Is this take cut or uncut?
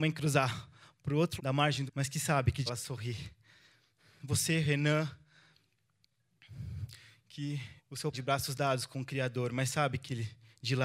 cut